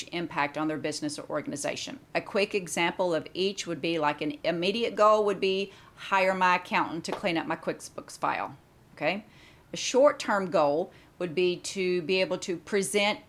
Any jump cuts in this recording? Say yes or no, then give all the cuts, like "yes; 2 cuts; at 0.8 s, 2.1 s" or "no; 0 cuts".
yes; 1 cut; at 2.0 s